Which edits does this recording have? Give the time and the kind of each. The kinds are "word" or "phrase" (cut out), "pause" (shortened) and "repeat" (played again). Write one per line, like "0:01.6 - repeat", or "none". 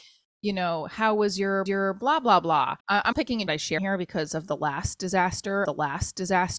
0:01.7 - repeat
0:02.8 - pause
0:03.1 - word
0:03.5 - phrase
0:03.8 - word
0:05.6 - repeat